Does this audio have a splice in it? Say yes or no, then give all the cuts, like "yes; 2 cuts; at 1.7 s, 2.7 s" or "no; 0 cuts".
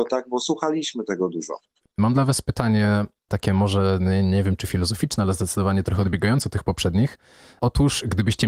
no; 0 cuts